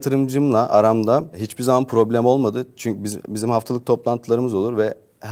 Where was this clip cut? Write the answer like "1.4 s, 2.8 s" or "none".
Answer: none